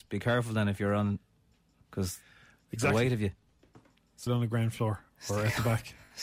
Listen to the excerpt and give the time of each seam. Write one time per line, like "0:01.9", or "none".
0:01.8
0:04.3